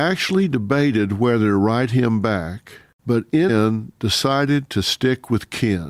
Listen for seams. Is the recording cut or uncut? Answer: cut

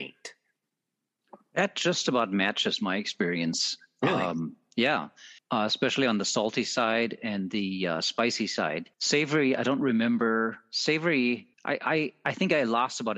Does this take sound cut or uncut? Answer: cut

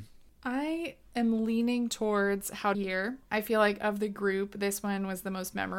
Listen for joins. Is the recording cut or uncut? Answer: cut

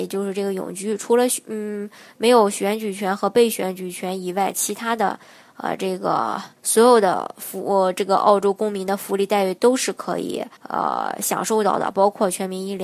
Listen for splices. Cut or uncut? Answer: cut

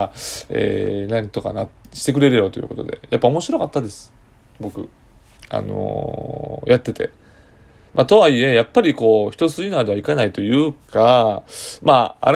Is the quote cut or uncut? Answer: uncut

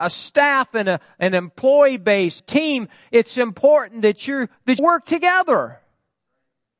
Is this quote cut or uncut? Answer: cut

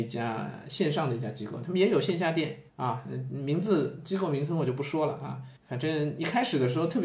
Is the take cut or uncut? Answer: cut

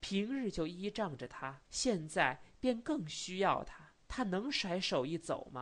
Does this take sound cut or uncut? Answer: cut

